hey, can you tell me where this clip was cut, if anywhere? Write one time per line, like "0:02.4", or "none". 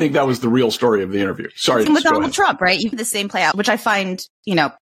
0:01.9
0:02.9
0:03.5